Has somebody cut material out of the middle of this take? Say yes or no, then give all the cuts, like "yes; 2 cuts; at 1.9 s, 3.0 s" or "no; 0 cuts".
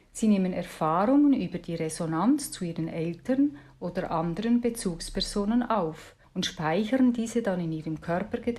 yes; 1 cut; at 6.2 s